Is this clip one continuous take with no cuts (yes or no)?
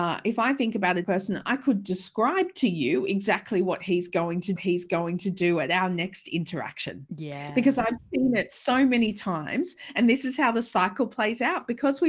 no